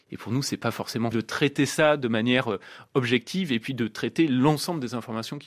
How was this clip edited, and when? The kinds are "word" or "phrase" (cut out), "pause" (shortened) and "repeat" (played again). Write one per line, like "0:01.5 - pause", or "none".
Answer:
0:01.1 - word